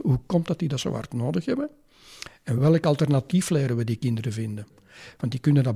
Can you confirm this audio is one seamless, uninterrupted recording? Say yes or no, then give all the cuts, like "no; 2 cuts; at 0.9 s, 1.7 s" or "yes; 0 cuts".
yes; 0 cuts